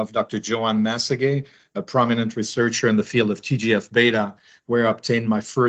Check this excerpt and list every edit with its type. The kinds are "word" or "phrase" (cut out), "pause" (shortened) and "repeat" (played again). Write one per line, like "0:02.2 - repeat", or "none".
none